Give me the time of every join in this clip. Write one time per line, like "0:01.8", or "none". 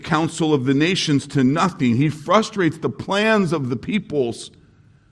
none